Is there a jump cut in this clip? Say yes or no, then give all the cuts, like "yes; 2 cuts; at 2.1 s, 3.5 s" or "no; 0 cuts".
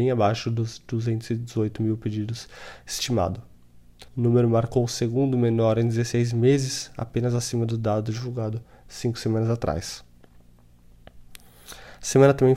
yes; 1 cut; at 4.1 s